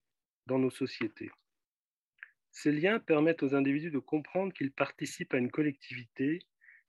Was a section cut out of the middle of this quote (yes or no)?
no